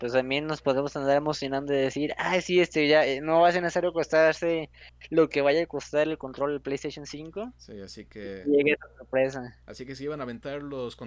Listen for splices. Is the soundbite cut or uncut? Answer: uncut